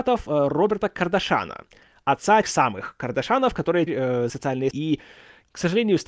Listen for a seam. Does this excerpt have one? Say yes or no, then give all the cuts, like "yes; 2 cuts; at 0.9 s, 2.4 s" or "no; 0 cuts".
yes; 4 cuts; at 2.4 s, 3.9 s, 4.3 s, 4.7 s